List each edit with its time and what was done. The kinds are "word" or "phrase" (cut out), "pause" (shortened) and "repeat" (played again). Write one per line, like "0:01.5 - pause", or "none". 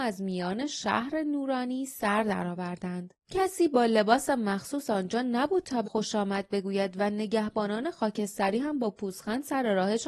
0:03.2 - pause
0:05.8 - word